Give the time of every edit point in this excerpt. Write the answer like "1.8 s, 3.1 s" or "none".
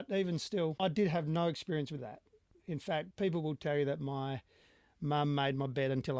2.0 s